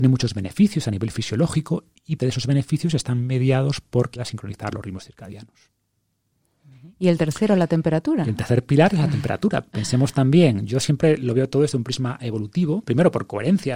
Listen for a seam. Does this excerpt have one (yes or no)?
yes